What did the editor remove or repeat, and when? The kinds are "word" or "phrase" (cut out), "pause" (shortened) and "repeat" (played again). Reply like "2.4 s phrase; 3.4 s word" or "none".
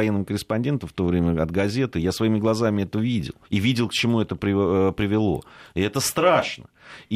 3.4 s pause